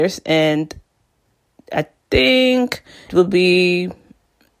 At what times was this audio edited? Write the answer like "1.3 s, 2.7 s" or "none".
3.1 s